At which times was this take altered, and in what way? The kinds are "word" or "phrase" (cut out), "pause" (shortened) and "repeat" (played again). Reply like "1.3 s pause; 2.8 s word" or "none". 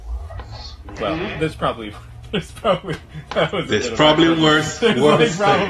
none